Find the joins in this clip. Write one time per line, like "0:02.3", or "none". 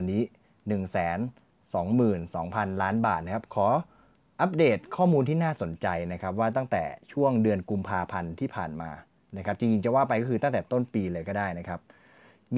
none